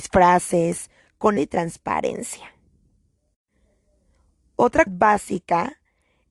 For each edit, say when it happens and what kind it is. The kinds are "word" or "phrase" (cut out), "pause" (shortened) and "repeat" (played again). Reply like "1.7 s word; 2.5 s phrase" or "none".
1.4 s word; 4.9 s word